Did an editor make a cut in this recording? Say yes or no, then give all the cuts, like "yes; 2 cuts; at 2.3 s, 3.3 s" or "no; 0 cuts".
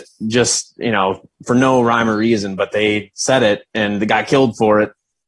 no; 0 cuts